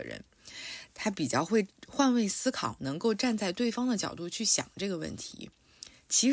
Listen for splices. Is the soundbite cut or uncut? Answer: uncut